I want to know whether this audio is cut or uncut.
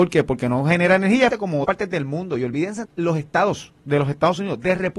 cut